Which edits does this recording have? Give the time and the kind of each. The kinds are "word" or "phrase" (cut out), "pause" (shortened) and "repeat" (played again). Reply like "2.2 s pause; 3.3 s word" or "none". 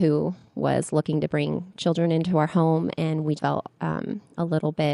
3.4 s word; 3.7 s pause